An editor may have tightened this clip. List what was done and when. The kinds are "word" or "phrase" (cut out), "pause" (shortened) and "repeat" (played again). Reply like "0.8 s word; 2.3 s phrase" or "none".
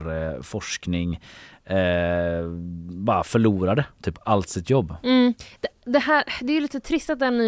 none